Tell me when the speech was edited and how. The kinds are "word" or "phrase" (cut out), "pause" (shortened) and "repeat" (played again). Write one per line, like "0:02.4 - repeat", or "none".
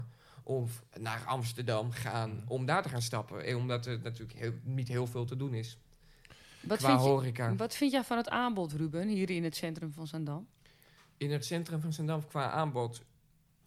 none